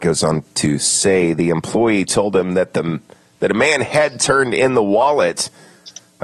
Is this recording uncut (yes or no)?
yes